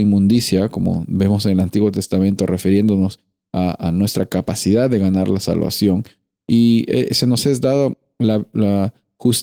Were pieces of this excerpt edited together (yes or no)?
no